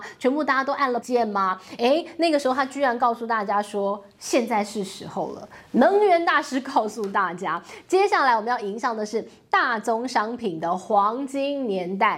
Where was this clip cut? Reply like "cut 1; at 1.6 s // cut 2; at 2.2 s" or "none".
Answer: cut 1; at 1.0 s